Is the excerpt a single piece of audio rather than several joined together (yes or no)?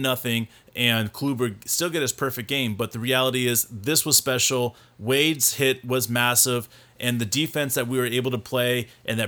yes